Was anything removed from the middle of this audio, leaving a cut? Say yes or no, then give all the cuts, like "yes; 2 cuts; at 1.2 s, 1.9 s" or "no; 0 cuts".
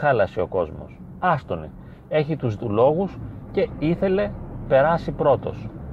yes; 2 cuts; at 2.6 s, 4.7 s